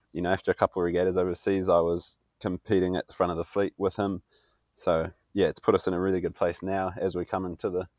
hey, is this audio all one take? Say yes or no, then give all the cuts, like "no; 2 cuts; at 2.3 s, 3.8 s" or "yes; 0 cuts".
yes; 0 cuts